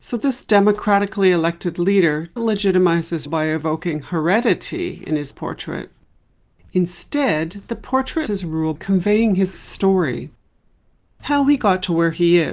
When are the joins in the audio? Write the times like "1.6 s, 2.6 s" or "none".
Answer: 2.4 s, 3.3 s, 5.3 s, 8.3 s, 8.8 s, 9.5 s